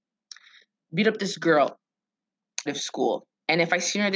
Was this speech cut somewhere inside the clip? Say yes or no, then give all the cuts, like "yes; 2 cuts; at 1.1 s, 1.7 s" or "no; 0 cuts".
yes; 1 cut; at 2.7 s